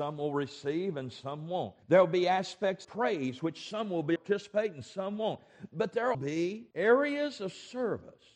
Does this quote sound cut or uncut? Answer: cut